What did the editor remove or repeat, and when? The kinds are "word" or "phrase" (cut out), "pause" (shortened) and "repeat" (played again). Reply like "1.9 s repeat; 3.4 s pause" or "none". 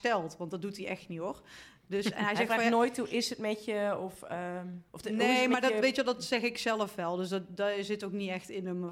4.9 s pause